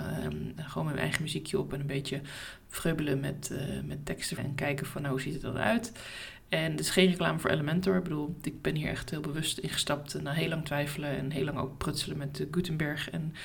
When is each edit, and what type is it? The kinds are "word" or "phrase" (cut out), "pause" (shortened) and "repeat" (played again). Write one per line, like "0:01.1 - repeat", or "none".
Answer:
0:04.4 - phrase